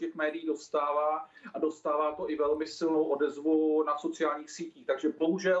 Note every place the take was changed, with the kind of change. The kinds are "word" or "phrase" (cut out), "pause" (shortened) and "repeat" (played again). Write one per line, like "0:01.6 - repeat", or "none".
none